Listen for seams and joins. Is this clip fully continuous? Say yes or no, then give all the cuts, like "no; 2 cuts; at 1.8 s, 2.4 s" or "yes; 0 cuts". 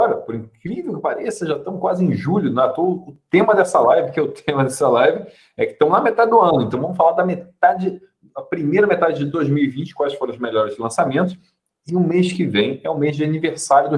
yes; 0 cuts